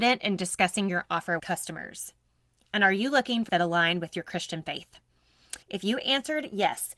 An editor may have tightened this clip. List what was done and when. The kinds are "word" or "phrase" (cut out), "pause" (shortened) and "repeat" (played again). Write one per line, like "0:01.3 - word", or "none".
0:01.4 - word
0:03.5 - word
0:05.6 - pause